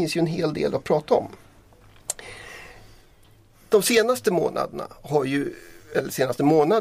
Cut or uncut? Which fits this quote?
uncut